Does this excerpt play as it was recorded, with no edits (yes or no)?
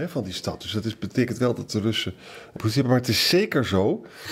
no